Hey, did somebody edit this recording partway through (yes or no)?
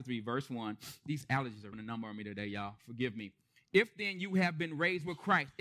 yes